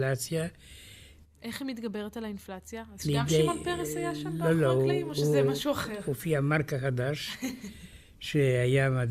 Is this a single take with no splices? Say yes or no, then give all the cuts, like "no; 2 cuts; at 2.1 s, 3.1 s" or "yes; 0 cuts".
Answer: yes; 0 cuts